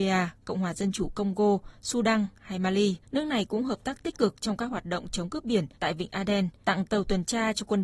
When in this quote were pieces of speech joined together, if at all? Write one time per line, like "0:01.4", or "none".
0:03.0
0:05.7
0:06.6